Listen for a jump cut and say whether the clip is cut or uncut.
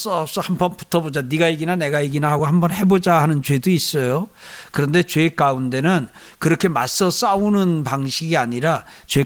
uncut